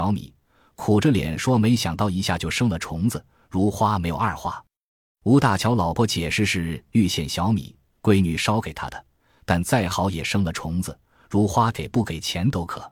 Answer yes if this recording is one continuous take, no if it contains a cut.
yes